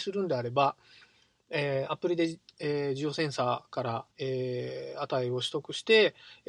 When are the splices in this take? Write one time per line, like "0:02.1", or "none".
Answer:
0:04.1